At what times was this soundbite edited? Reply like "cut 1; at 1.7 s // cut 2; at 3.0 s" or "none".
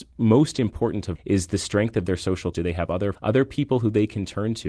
cut 1; at 1.2 s // cut 2; at 2.5 s // cut 3; at 3.1 s